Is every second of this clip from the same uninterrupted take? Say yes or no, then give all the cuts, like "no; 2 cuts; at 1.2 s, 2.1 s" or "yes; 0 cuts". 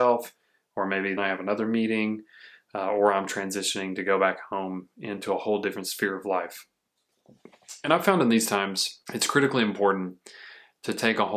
no; 2 cuts; at 1.2 s, 9.0 s